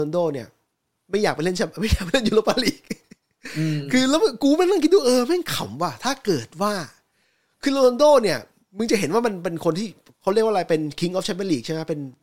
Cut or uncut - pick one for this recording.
uncut